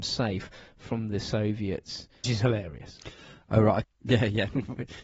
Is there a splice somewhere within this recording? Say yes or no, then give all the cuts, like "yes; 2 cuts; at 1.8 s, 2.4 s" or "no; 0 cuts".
yes; 2 cuts; at 2.2 s, 3.8 s